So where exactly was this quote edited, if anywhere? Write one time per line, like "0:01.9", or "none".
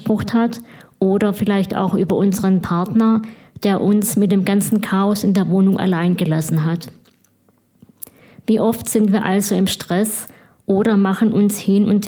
none